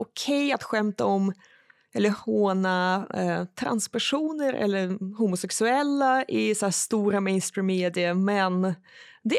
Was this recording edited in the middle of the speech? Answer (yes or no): no